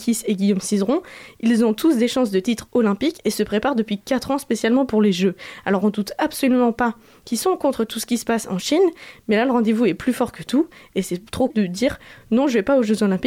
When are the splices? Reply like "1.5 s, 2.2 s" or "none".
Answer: 11.5 s